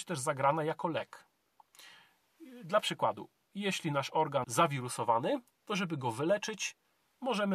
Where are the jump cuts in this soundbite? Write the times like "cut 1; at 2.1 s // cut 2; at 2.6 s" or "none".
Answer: cut 1; at 4.4 s